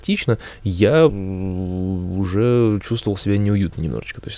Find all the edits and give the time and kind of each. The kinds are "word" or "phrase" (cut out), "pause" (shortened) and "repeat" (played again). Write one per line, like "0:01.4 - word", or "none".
0:01.1 - word